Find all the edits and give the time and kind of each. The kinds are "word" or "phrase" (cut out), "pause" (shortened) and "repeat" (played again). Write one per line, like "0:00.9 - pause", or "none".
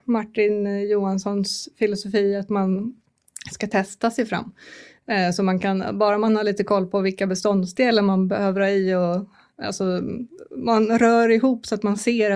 none